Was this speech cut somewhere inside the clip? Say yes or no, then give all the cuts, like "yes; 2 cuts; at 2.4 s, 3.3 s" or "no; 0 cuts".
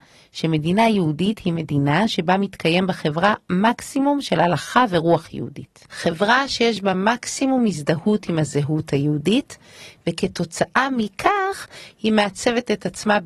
no; 0 cuts